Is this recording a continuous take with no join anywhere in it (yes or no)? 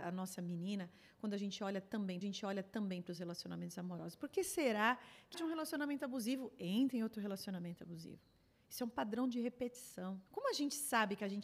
no